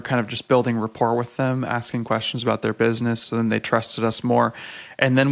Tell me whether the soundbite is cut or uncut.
uncut